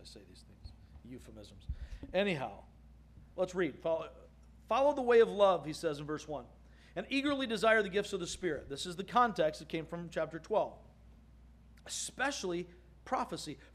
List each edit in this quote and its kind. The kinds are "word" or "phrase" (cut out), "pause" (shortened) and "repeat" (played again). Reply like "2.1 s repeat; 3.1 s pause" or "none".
none